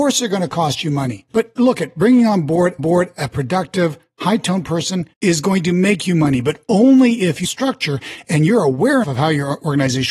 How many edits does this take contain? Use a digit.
5